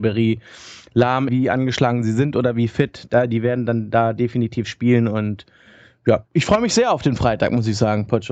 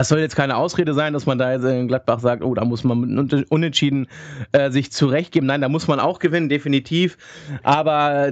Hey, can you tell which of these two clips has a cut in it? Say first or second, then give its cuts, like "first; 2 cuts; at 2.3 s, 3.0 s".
first; 2 cuts; at 1.3 s, 6.3 s